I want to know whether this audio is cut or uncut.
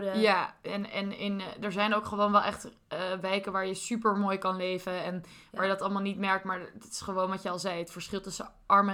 uncut